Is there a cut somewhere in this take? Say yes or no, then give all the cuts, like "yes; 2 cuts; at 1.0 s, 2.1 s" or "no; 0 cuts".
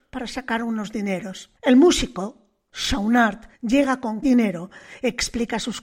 yes; 3 cuts; at 1.6 s, 3.5 s, 4.2 s